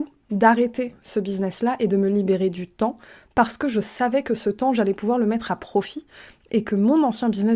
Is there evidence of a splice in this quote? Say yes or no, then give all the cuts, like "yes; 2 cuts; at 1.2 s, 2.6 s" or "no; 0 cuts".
no; 0 cuts